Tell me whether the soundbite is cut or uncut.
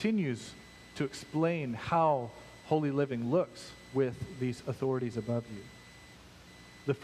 uncut